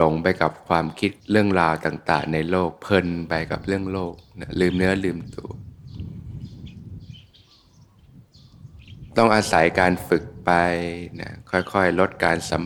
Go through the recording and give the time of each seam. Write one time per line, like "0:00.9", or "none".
0:01.2